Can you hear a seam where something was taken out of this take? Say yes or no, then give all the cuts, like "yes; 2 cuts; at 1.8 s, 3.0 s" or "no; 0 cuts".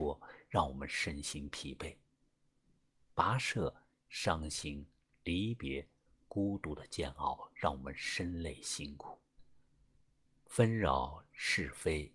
no; 0 cuts